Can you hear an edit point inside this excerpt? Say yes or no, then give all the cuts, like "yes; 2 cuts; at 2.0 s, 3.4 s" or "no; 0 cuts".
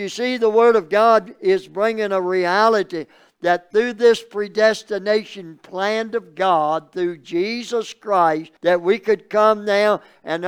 yes; 1 cut; at 8.6 s